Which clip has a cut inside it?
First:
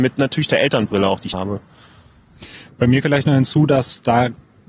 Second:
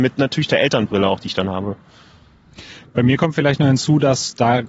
first; 2 cuts; at 1.3 s, 3.0 s

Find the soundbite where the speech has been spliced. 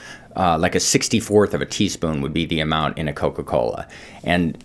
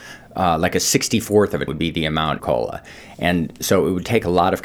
second; 2 cuts; at 1.7 s, 2.4 s

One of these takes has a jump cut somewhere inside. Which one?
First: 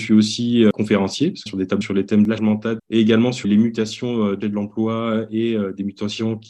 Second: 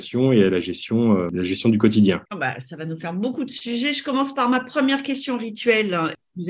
first; 6 cuts; at 1.5 s, 1.8 s, 2.4 s, 2.8 s, 3.4 s, 4.4 s

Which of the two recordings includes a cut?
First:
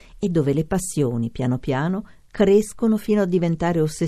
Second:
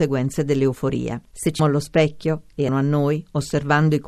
second; 3 cuts; at 1.3 s, 1.6 s, 2.7 s

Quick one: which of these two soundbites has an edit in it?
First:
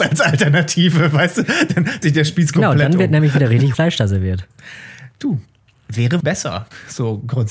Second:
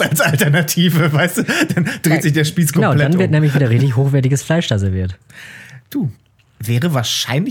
first; 3 cuts; at 2.0 s, 3.7 s, 6.2 s

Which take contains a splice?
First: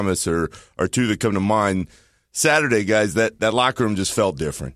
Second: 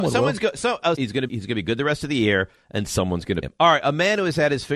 second; 3 cuts; at 1.0 s, 1.3 s, 3.4 s

